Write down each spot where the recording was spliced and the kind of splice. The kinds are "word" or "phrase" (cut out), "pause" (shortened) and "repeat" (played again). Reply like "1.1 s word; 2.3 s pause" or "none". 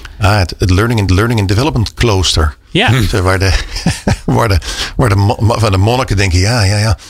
1.1 s repeat